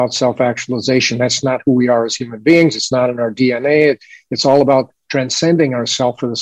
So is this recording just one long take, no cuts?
yes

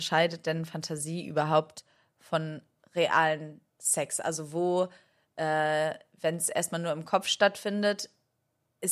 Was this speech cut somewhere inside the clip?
no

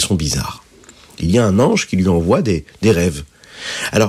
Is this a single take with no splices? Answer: yes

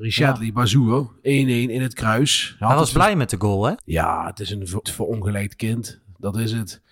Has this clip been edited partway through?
yes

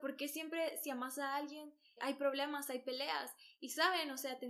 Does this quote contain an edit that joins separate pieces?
yes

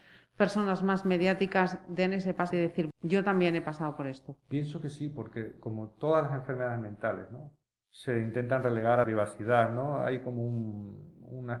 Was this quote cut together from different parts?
yes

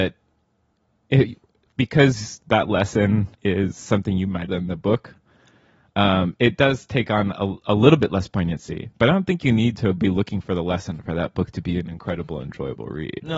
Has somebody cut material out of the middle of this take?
yes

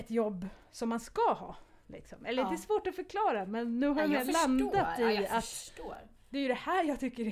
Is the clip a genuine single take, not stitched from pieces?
yes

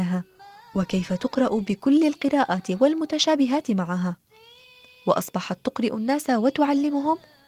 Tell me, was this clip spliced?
no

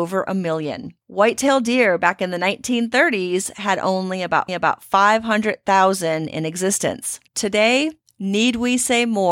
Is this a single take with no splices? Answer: no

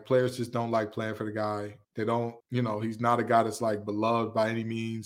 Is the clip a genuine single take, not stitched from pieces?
no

